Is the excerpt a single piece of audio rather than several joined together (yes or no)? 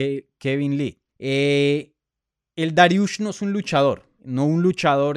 no